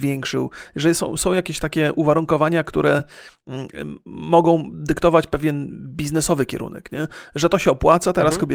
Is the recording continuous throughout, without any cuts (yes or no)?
yes